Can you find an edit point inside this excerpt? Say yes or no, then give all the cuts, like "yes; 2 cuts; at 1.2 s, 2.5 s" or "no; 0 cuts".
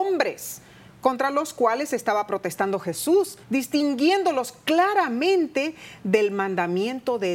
yes; 1 cut; at 3.4 s